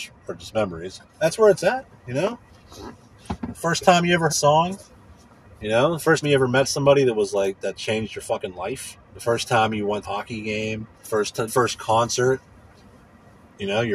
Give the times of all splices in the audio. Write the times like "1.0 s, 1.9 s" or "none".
1.1 s, 4.3 s, 6.2 s, 9.1 s, 10.0 s, 10.9 s, 11.5 s